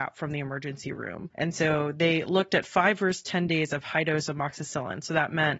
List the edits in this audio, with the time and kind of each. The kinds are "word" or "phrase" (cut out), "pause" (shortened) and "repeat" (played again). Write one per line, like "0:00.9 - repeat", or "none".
none

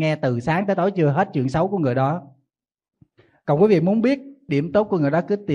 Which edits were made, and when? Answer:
0:04.5 - word

